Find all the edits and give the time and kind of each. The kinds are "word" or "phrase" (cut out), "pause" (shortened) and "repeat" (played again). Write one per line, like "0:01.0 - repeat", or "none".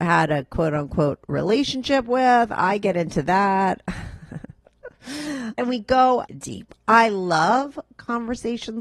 0:06.3 - word